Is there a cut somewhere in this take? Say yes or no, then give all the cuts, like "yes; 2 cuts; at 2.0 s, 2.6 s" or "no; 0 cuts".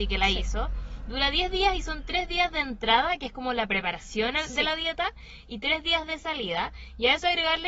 no; 0 cuts